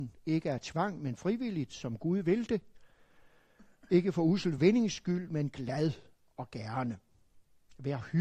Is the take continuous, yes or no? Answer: yes